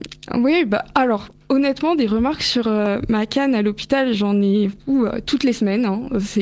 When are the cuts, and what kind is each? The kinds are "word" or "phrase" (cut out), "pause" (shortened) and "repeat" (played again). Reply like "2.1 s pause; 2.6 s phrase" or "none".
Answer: none

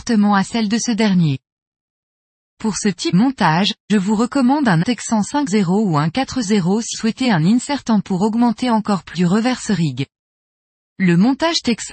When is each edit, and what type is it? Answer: 3.1 s word; 3.9 s word; 4.8 s word; 5.5 s word; 6.4 s word; 6.9 s word; 7.2 s word; 8.0 s word; 9.1 s word

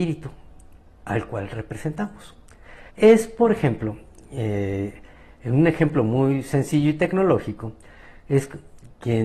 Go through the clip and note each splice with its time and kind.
2.9 s pause

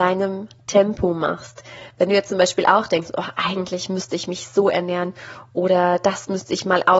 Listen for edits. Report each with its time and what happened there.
none

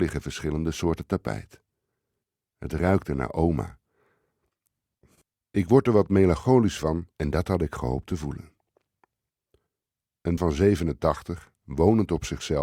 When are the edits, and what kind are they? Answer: 7.1 s pause; 10.4 s word

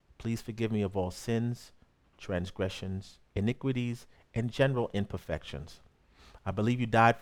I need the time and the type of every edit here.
3.3 s pause

